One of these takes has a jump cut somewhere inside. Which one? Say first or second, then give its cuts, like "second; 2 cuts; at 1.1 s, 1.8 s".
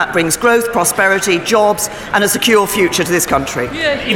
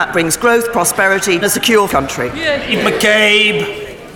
second; 2 cuts; at 1.4 s, 1.9 s